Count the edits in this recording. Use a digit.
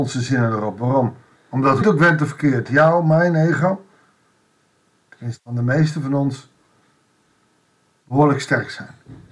3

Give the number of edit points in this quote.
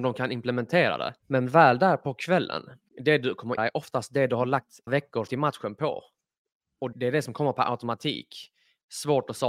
6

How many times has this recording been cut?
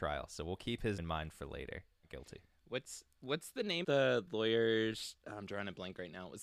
3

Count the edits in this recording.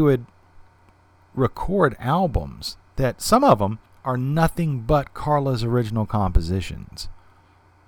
1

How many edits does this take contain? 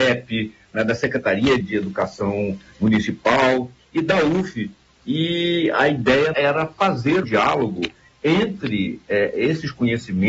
3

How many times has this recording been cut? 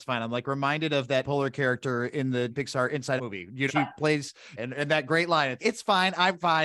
6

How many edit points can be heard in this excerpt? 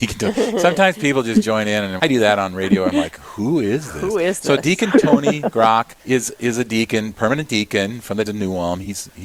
3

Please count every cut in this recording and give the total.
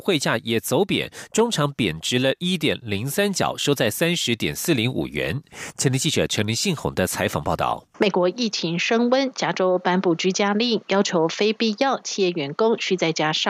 1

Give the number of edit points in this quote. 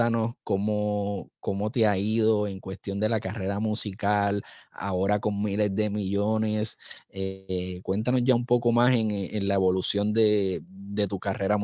0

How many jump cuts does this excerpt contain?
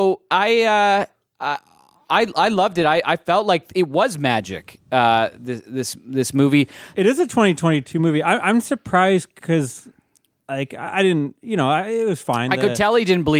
0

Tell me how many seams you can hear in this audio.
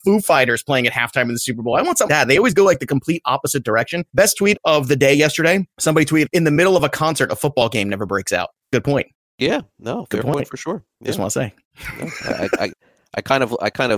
6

